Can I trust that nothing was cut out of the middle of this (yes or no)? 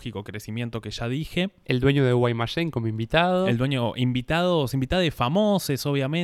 yes